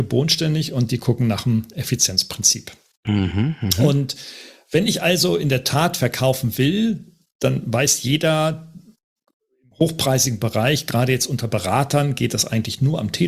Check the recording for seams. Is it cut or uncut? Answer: uncut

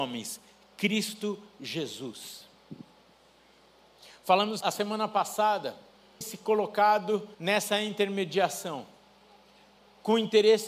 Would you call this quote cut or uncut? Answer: cut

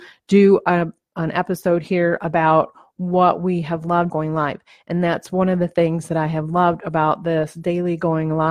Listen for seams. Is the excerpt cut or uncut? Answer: cut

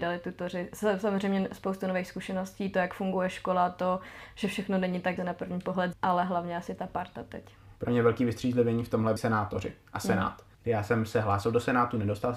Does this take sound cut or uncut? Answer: cut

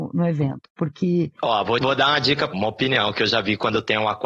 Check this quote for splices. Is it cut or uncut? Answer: cut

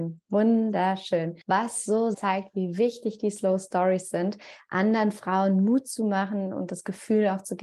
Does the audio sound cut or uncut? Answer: cut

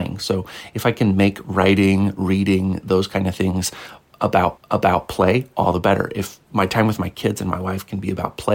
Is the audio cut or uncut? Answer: cut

